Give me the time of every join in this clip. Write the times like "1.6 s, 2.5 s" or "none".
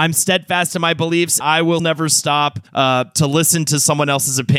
1.4 s, 1.8 s, 2.7 s

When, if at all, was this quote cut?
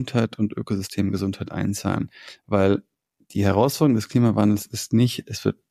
none

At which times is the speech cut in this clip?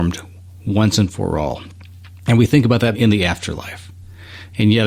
2.9 s

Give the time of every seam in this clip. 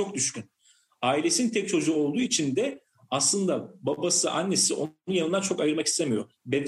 none

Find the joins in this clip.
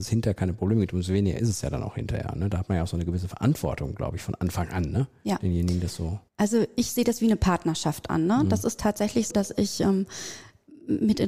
6.3 s, 9.3 s

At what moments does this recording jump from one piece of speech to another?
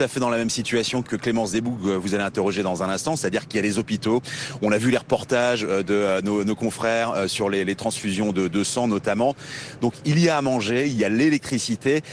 1.0 s

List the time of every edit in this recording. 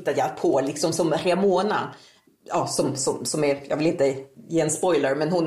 none

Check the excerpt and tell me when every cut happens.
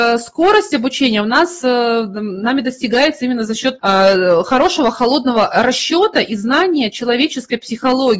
3.8 s

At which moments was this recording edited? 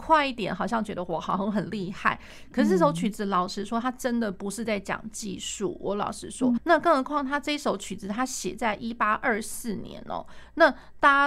6.6 s

